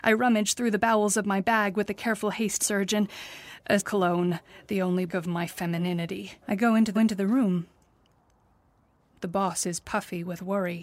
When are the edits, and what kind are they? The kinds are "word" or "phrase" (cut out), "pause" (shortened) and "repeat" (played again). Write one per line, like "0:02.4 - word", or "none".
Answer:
0:02.6 - phrase
0:03.8 - word
0:05.1 - word
0:06.4 - pause
0:07.0 - repeat